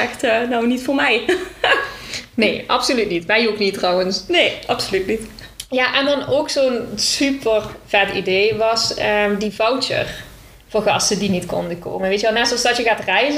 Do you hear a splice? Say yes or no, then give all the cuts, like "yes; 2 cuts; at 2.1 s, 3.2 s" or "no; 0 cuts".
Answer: no; 0 cuts